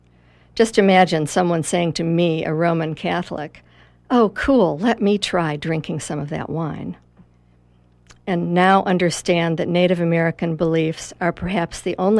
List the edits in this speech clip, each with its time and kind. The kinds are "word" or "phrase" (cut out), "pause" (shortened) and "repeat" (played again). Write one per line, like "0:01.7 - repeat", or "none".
none